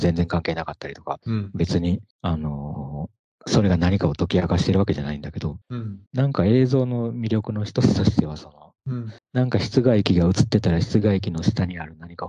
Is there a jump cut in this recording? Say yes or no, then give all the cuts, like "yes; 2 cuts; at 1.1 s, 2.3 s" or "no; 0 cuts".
yes; 6 cuts; at 1.2 s, 2.1 s, 5.6 s, 6.1 s, 8.8 s, 9.2 s